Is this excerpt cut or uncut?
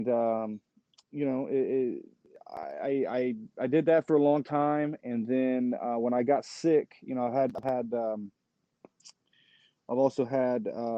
uncut